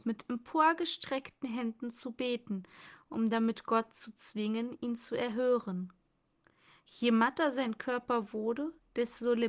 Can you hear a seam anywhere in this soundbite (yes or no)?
no